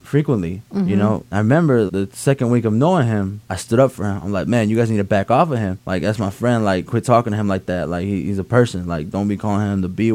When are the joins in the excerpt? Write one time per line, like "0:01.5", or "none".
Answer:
0:01.3
0:01.9